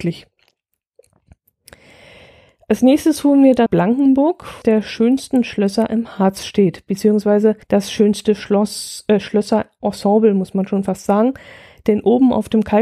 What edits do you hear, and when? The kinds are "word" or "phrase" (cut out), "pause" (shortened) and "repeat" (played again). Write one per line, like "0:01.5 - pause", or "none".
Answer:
0:03.7 - word
0:04.6 - phrase
0:07.6 - pause